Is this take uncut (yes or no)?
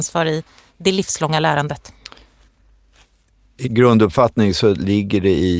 no